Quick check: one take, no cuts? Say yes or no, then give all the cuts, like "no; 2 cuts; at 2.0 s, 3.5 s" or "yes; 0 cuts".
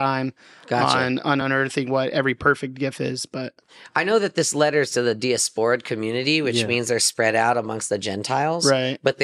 yes; 0 cuts